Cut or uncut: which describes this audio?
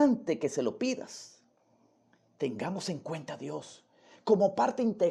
uncut